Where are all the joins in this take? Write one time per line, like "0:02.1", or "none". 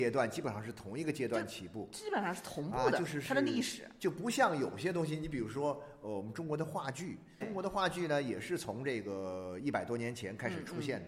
0:07.4